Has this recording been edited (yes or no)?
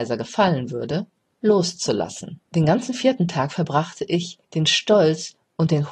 yes